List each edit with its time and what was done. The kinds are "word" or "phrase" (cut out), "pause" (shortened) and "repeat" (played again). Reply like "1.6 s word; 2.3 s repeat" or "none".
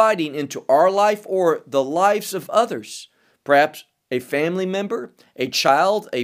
none